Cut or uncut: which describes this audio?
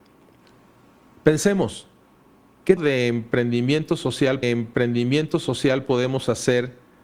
cut